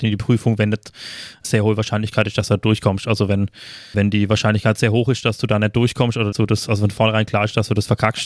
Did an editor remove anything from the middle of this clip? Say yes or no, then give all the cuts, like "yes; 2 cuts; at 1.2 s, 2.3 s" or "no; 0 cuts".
yes; 3 cuts; at 1.4 s, 3.9 s, 6.3 s